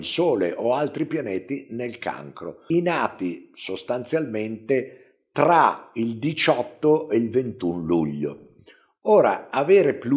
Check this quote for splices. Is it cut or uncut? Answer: cut